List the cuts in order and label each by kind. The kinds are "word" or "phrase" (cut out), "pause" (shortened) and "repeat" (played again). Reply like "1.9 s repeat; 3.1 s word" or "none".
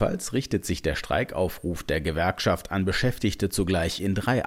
none